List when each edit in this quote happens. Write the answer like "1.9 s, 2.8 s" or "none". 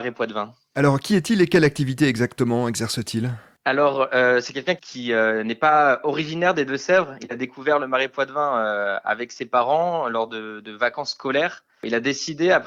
none